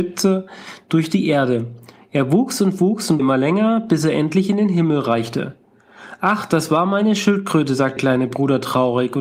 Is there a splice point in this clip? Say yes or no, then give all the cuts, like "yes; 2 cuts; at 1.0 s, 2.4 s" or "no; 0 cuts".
yes; 2 cuts; at 3.2 s, 8.0 s